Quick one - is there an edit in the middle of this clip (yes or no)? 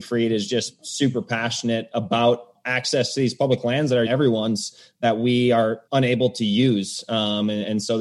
yes